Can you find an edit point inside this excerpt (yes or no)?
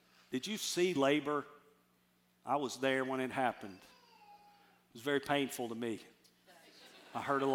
no